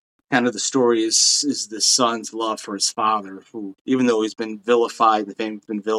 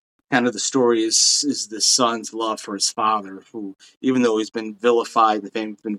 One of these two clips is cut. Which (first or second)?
first